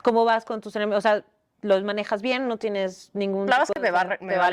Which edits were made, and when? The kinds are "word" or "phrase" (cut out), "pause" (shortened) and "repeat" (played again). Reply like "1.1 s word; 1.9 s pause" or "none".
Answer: none